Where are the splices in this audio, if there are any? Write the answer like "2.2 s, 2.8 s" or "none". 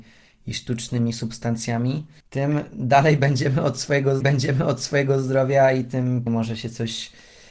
2.2 s, 4.2 s, 6.3 s